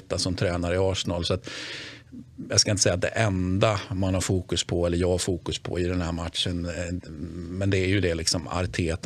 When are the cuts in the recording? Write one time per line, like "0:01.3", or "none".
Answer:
none